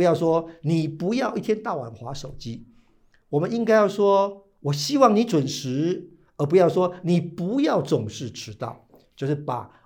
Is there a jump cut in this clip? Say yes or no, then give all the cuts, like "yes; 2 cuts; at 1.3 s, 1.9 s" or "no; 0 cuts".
no; 0 cuts